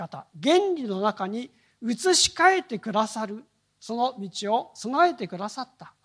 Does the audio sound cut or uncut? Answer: uncut